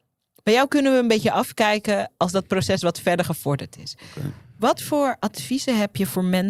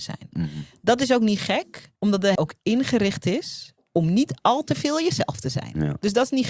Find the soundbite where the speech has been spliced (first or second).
second